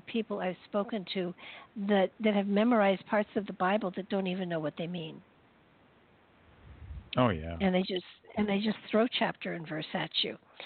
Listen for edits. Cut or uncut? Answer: cut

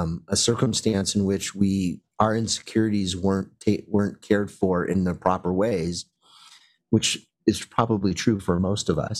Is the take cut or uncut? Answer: uncut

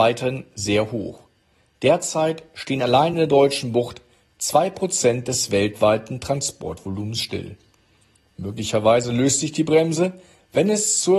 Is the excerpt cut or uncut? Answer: uncut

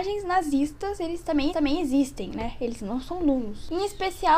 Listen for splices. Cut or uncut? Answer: cut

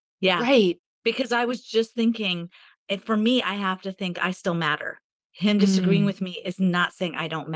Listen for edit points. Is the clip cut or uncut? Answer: uncut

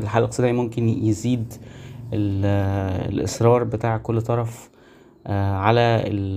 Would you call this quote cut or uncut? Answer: uncut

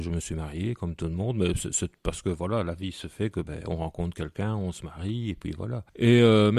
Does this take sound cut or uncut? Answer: uncut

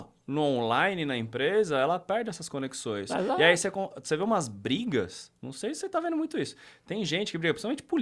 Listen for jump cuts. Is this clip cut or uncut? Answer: uncut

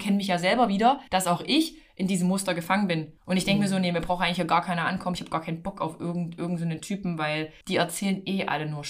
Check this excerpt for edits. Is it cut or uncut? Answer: cut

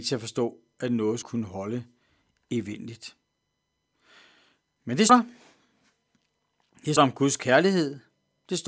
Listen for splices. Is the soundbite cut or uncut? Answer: cut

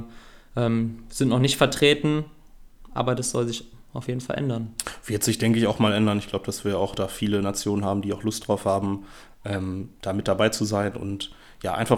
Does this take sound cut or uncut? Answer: uncut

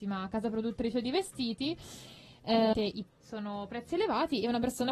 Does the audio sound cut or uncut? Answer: cut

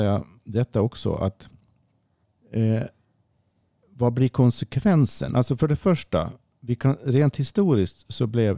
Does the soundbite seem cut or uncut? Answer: cut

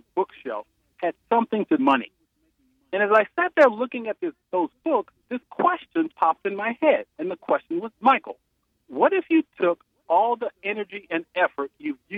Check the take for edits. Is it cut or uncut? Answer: cut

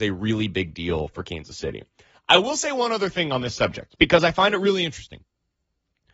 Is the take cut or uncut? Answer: uncut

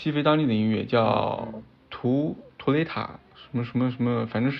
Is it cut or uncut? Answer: cut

